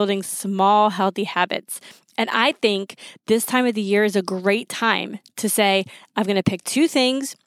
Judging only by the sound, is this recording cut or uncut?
uncut